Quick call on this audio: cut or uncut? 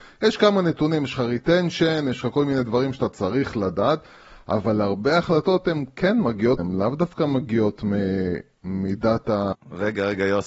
cut